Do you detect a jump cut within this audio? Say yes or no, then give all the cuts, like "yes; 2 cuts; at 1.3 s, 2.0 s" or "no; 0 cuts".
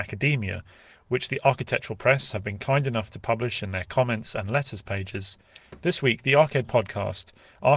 no; 0 cuts